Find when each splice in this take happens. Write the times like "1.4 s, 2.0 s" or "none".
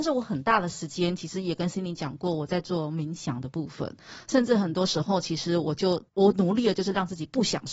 6.1 s